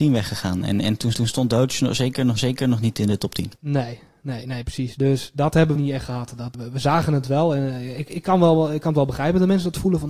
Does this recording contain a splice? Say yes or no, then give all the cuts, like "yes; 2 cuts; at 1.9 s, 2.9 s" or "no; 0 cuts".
yes; 5 cuts; at 1.1 s, 2.4 s, 3.6 s, 5.8 s, 6.5 s